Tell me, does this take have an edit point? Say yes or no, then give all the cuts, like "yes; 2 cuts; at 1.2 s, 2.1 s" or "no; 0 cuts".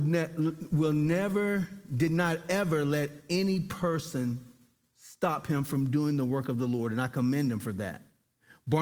no; 0 cuts